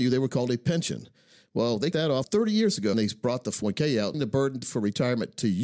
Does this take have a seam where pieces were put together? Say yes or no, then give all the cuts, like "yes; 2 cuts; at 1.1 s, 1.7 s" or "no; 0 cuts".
yes; 6 cuts; at 1.9 s, 2.2 s, 2.9 s, 3.6 s, 4.1 s, 4.6 s